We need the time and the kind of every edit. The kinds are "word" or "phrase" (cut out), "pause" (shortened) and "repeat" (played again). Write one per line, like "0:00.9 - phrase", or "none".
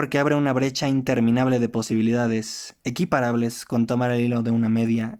none